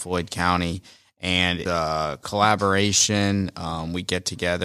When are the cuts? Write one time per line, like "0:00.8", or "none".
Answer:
0:01.7